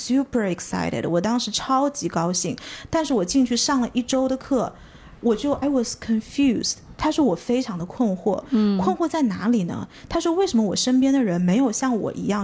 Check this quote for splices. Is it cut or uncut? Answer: cut